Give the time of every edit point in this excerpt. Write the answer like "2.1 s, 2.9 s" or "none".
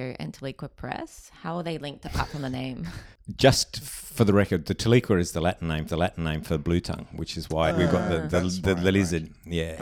5.9 s, 7.7 s